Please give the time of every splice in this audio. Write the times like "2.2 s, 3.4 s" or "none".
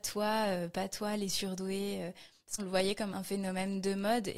2.6 s, 3.1 s